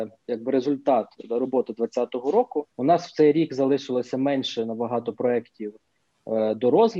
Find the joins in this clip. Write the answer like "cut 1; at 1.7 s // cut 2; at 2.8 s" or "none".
cut 1; at 2.7 s

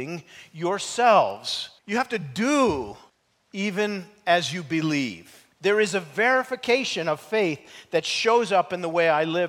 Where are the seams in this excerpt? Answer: cut 1; at 1.8 s // cut 2; at 3.1 s // cut 3; at 5.5 s

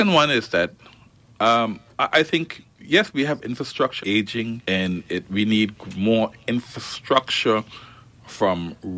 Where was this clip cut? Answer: cut 1; at 4.0 s // cut 2; at 4.6 s

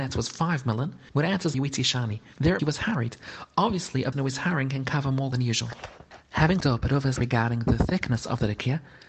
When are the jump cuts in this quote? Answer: cut 1; at 1.5 s // cut 2; at 2.6 s // cut 3; at 4.1 s // cut 4; at 5.3 s // cut 5; at 6.6 s // cut 6; at 7.2 s

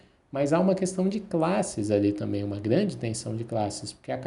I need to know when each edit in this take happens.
none

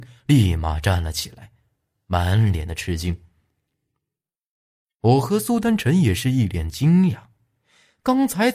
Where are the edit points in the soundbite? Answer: none

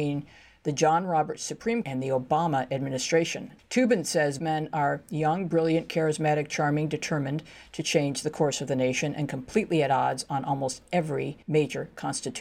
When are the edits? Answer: cut 1; at 1.8 s // cut 2; at 4.4 s // cut 3; at 11.4 s

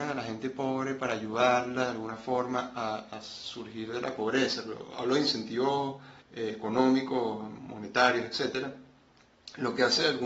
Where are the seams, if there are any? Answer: cut 1; at 6.2 s

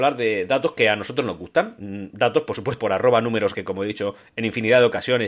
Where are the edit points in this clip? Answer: cut 1; at 2.8 s // cut 2; at 3.5 s

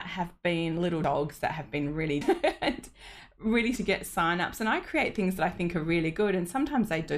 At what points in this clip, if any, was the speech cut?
cut 1; at 2.2 s // cut 2; at 3.8 s

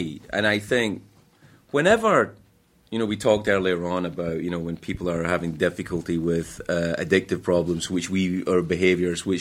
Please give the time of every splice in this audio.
none

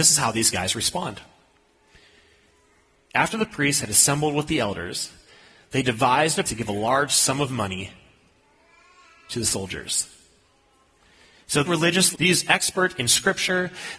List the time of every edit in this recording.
cut 1; at 6.4 s // cut 2; at 11.6 s // cut 3; at 12.1 s

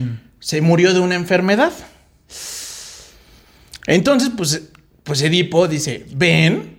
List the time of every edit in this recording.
none

